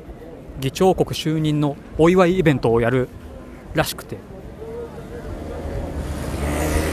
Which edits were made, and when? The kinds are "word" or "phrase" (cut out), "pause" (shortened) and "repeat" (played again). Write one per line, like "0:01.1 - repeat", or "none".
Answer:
none